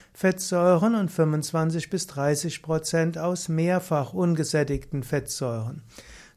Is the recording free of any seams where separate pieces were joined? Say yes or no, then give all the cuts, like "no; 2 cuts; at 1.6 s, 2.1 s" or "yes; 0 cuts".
yes; 0 cuts